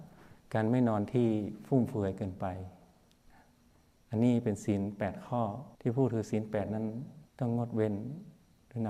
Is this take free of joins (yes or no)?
no